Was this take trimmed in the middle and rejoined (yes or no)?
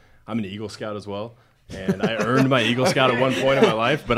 no